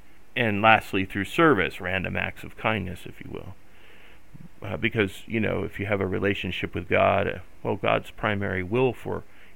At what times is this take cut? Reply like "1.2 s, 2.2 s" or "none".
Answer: none

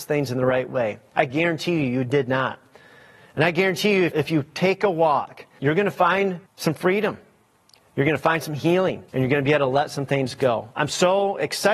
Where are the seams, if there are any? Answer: 4.1 s, 5.6 s, 6.5 s, 9.1 s

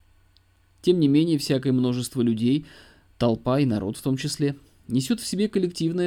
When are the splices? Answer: none

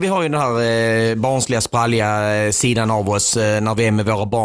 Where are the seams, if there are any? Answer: none

